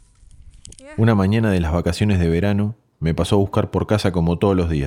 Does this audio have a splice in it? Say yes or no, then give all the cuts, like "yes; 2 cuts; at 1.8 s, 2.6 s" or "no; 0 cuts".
no; 0 cuts